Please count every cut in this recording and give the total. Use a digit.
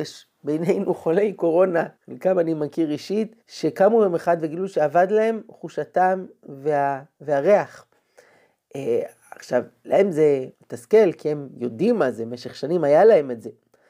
3